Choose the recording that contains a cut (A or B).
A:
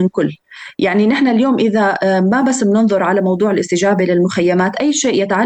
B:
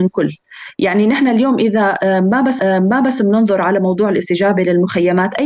B